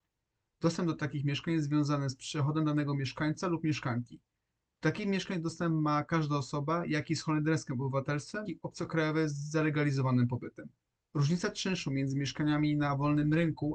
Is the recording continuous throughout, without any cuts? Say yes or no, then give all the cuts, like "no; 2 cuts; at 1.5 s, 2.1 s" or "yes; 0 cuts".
no; 2 cuts; at 8.5 s, 10.8 s